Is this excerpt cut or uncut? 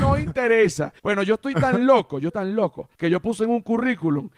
cut